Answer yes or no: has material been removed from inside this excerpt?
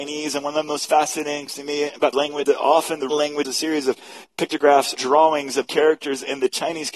yes